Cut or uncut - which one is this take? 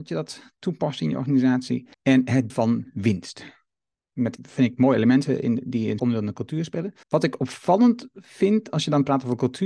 cut